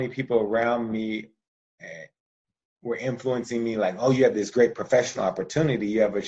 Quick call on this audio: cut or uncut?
uncut